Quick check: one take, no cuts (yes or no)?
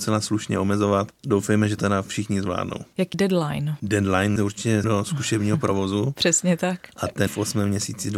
no